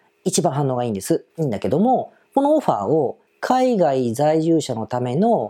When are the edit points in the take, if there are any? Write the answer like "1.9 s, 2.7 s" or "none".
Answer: 1.3 s, 3.3 s